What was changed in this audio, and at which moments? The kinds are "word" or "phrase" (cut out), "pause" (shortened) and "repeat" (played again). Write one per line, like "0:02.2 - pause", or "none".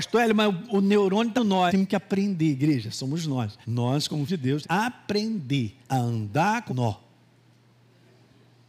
0:01.4 - word
0:01.7 - phrase
0:03.6 - pause
0:04.3 - word
0:04.6 - phrase
0:05.8 - pause
0:06.7 - phrase